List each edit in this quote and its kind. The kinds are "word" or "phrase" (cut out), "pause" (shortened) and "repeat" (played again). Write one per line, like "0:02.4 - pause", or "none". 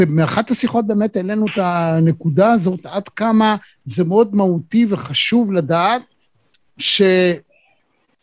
none